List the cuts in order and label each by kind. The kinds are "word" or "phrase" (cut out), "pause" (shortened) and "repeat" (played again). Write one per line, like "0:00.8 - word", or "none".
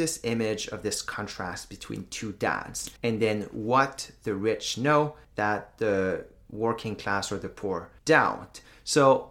0:03.0 - pause
0:05.2 - pause
0:08.0 - pause